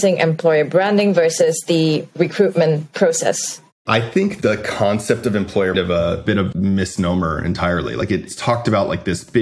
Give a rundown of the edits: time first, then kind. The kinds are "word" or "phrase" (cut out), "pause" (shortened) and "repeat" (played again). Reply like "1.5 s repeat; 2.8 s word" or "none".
5.7 s phrase; 6.5 s word